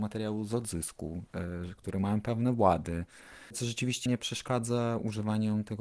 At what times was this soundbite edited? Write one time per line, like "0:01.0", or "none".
0:04.1